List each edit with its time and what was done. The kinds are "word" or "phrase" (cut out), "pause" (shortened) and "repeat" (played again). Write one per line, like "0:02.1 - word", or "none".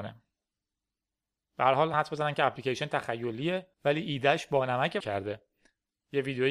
0:01.9 - phrase
0:03.7 - pause
0:05.0 - phrase